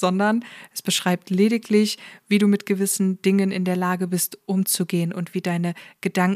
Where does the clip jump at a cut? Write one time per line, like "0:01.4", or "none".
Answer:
none

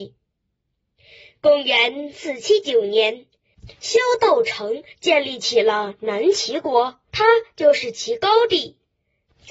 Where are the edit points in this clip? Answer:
0:07.1

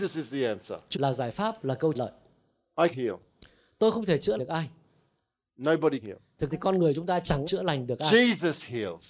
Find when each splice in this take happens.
0:00.9
0:01.9
0:02.9
0:04.4
0:06.0
0:06.5
0:07.4

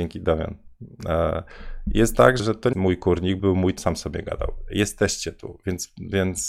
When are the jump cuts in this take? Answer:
0:02.4
0:02.7
0:03.4
0:03.8

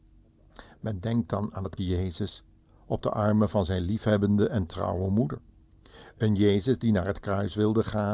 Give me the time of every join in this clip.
0:01.8

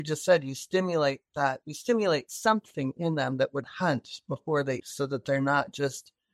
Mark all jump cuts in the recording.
0:03.6
0:04.8

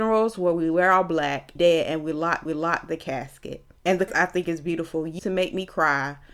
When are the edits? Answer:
0:01.6
0:02.5
0:03.8
0:04.1
0:05.2

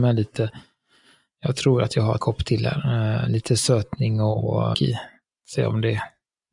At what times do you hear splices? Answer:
0:02.2
0:04.7

